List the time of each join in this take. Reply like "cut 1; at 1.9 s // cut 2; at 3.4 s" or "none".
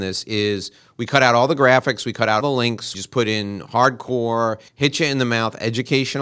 cut 1; at 2.4 s // cut 2; at 2.9 s // cut 3; at 4.7 s